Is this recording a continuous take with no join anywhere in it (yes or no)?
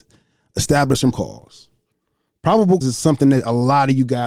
no